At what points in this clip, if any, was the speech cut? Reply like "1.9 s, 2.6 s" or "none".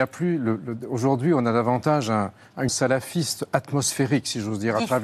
2.7 s